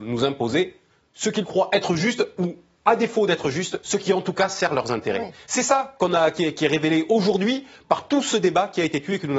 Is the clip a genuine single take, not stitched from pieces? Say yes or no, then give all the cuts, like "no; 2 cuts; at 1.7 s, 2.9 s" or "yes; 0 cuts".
yes; 0 cuts